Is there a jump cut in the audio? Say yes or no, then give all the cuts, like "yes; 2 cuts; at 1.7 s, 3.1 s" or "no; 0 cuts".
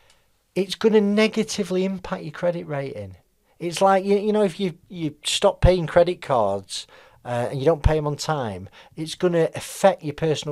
no; 0 cuts